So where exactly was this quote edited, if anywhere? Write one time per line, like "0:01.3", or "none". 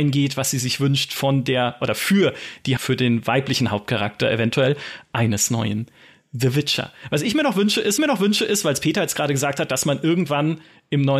0:02.8
0:08.0